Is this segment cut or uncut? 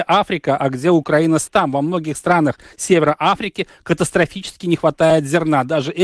cut